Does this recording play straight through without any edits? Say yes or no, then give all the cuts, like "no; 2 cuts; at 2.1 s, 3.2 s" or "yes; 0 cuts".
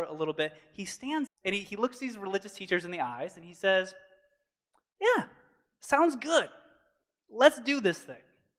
no; 1 cut; at 1.3 s